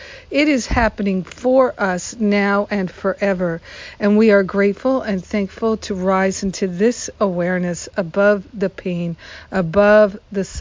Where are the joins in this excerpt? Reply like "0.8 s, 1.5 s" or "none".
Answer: none